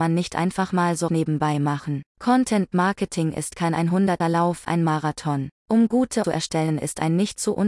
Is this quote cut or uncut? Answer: cut